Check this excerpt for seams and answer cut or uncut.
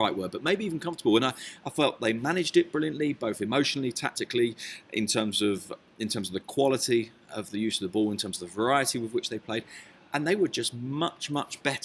uncut